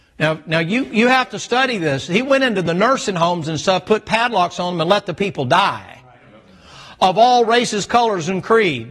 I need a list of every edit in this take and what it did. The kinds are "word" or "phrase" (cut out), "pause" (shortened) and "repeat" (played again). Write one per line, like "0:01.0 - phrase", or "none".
none